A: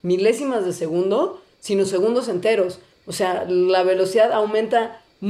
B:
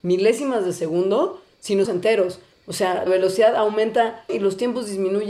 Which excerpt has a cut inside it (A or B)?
B